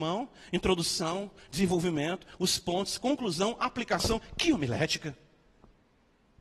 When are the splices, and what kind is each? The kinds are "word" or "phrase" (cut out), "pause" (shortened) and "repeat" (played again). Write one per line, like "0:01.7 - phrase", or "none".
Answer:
none